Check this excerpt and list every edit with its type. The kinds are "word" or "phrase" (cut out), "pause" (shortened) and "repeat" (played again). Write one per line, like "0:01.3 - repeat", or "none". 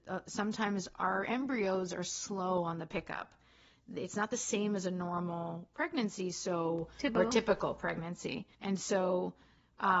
0:08.5 - pause